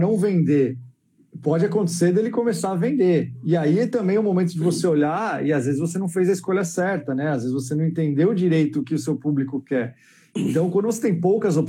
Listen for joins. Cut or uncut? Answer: uncut